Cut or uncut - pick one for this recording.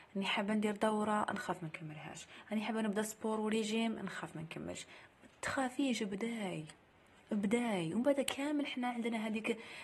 uncut